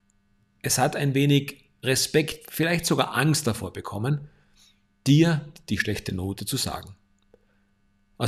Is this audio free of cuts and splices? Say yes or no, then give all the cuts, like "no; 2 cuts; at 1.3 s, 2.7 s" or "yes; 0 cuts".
yes; 0 cuts